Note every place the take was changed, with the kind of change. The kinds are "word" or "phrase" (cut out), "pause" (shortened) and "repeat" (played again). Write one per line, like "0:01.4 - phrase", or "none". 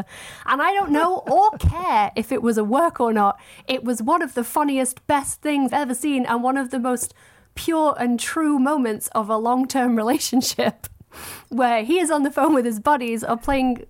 0:05.7 - word